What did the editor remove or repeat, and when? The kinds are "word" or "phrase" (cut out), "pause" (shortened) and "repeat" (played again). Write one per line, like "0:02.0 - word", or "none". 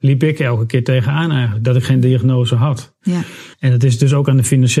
0:03.5 - pause